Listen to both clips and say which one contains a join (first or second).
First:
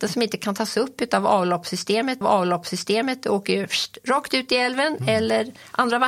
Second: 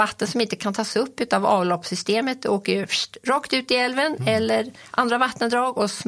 first